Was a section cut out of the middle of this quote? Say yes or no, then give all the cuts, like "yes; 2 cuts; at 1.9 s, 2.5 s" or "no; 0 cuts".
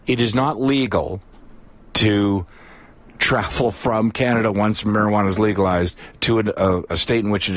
no; 0 cuts